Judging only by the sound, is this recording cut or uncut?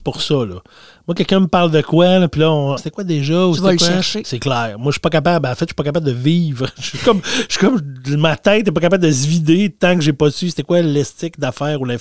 cut